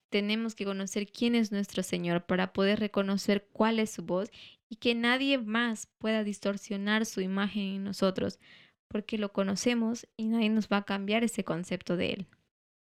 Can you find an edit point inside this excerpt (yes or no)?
no